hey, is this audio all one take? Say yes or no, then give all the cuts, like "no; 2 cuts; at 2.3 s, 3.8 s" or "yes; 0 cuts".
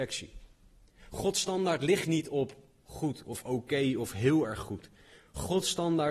yes; 0 cuts